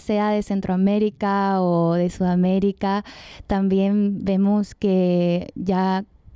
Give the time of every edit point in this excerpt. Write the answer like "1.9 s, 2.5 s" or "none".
none